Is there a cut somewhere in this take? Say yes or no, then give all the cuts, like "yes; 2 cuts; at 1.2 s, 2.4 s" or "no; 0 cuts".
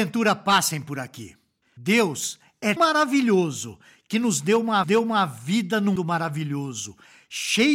yes; 4 cuts; at 1.6 s, 2.8 s, 4.8 s, 6.0 s